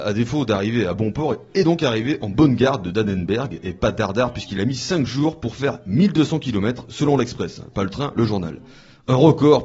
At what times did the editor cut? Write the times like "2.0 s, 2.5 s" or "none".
none